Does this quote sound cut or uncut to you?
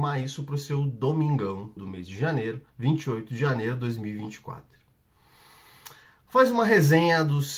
cut